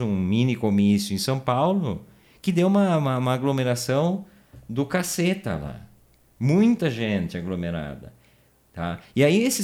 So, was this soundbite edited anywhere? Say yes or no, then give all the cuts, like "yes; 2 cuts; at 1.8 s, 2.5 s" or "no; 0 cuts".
no; 0 cuts